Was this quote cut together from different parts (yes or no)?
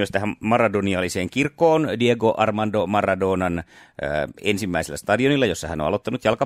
no